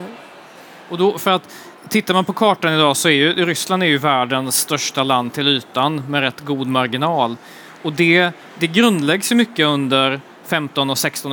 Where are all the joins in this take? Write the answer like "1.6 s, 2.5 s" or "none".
1.8 s